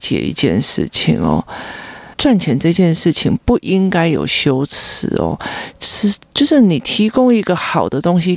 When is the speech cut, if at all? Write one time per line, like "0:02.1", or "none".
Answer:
0:02.1